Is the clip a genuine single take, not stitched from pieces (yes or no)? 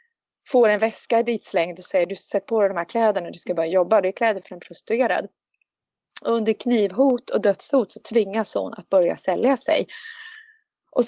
yes